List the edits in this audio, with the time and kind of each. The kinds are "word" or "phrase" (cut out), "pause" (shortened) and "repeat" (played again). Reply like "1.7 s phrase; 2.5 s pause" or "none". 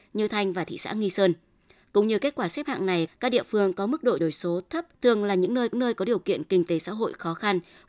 3.1 s phrase; 4.2 s word; 4.9 s pause; 5.7 s repeat